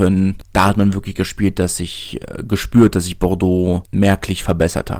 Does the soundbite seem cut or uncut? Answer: uncut